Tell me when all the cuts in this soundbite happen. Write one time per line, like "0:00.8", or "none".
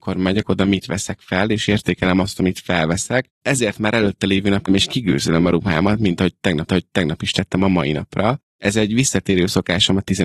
0:04.7
0:06.7